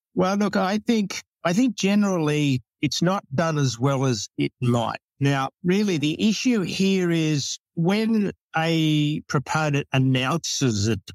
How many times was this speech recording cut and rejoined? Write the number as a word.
three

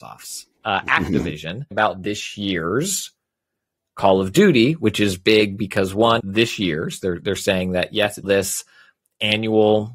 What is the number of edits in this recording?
three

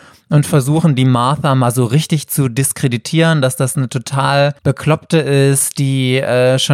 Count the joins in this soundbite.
one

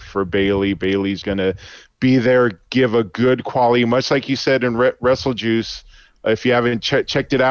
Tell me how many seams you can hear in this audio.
one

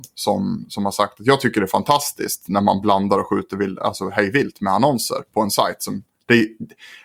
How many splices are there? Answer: zero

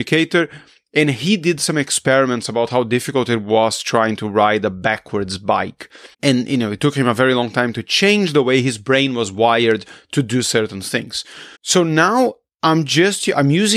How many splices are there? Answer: two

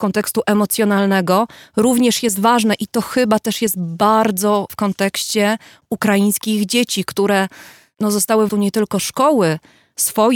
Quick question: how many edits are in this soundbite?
two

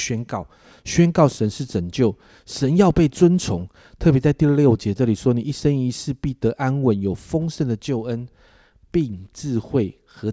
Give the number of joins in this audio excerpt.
zero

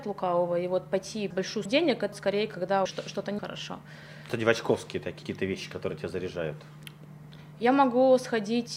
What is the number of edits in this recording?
seven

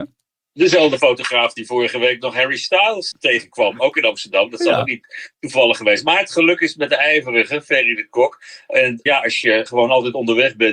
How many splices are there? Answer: one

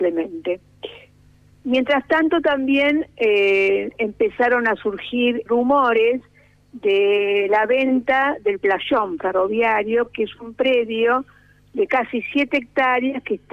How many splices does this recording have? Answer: one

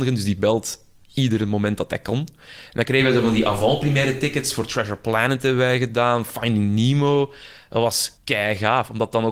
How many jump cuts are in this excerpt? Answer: one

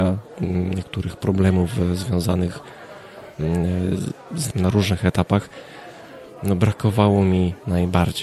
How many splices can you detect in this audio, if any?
one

